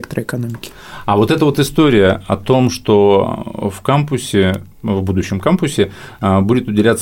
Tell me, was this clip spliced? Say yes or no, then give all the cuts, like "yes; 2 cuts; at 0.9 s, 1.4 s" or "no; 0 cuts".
yes; 1 cut; at 4.7 s